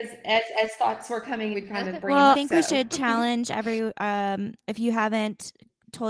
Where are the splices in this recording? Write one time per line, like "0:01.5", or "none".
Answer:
0:01.5
0:02.3